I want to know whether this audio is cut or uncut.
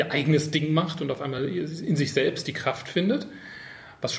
uncut